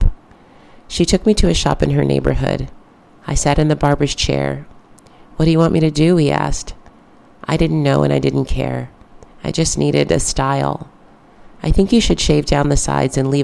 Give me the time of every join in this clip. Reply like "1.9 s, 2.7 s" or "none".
none